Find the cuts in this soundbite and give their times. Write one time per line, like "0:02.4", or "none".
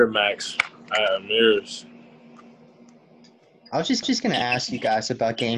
0:04.0